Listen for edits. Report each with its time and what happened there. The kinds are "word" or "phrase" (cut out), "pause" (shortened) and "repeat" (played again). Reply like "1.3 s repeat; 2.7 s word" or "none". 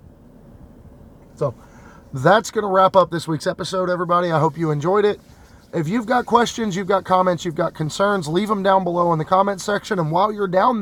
none